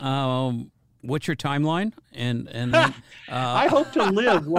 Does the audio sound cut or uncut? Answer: uncut